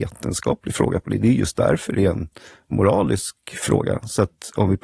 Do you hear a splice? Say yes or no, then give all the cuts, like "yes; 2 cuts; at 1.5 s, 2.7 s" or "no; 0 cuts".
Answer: no; 0 cuts